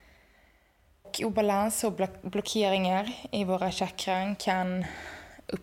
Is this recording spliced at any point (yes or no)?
no